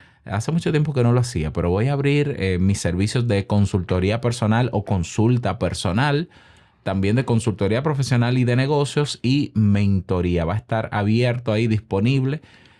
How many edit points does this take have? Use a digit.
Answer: 0